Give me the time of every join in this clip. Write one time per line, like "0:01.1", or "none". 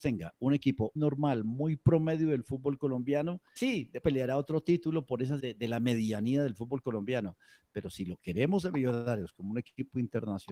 0:01.0
0:03.6
0:04.0
0:05.4